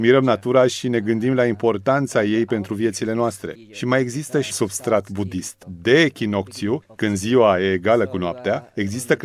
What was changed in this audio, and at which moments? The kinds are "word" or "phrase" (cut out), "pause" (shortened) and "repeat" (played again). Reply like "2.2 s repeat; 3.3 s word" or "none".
4.5 s word